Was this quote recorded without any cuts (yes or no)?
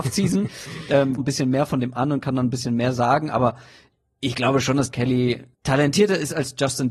no